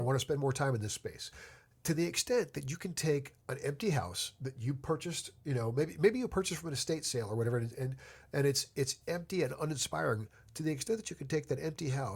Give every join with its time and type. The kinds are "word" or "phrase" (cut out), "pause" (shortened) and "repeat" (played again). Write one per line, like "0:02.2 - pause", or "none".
none